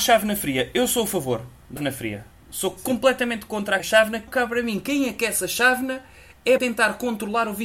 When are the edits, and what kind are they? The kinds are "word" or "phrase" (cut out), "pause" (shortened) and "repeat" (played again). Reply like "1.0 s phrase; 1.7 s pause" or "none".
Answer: 1.8 s word; 3.8 s word; 4.3 s word; 6.6 s word